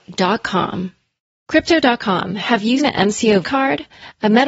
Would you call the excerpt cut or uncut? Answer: cut